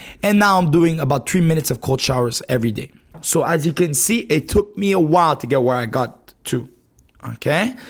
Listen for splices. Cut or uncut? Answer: uncut